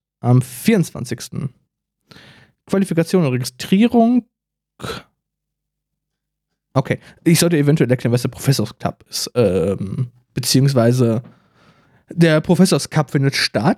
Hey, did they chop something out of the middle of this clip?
no; 0 cuts

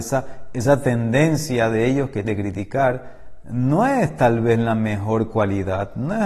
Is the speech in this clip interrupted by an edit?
yes; 1 cut; at 2.2 s

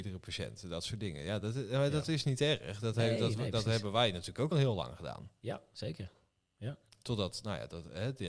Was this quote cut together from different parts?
yes; 1 cut; at 4.5 s

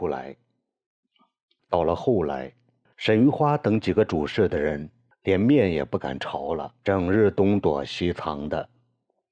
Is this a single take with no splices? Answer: no; 1 cut; at 6.8 s

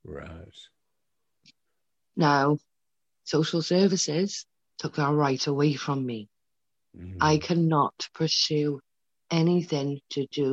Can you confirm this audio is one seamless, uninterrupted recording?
yes; 0 cuts

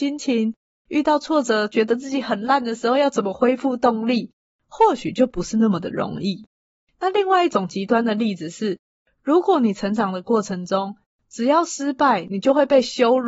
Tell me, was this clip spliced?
no; 0 cuts

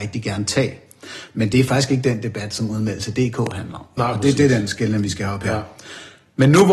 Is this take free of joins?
yes; 0 cuts

